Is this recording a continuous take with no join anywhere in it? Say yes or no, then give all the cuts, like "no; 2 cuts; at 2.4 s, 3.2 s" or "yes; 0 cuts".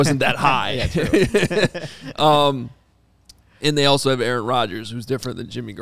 yes; 0 cuts